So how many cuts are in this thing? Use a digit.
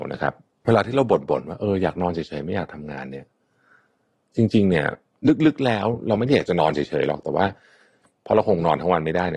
0